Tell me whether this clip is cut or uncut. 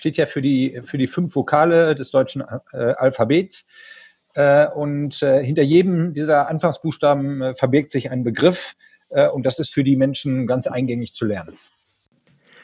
uncut